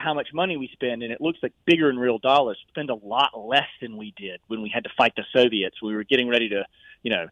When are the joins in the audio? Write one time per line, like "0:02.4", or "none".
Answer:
0:02.7